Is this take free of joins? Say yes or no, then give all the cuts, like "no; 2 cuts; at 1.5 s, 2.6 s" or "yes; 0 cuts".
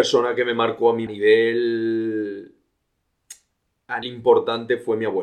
no; 2 cuts; at 1.1 s, 4.0 s